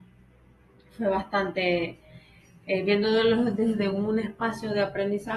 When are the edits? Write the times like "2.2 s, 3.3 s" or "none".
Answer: none